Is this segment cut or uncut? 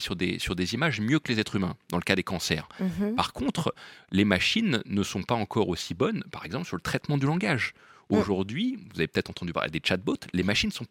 uncut